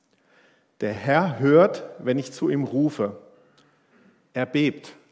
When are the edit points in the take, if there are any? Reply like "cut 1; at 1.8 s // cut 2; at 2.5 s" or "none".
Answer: none